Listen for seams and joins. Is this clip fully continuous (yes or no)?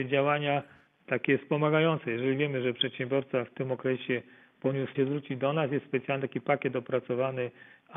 no